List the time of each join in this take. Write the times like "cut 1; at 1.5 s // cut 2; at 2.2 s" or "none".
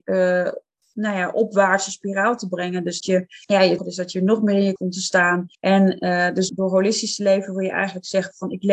cut 1; at 3.0 s // cut 2; at 3.4 s // cut 3; at 3.8 s // cut 4; at 4.8 s // cut 5; at 5.5 s // cut 6; at 6.5 s